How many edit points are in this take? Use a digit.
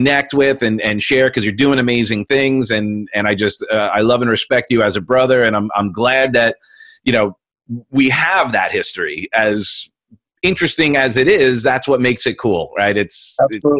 0